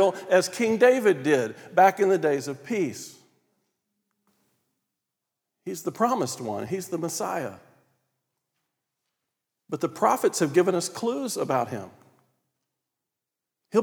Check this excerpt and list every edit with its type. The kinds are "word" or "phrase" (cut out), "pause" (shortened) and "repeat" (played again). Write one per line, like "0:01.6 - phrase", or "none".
none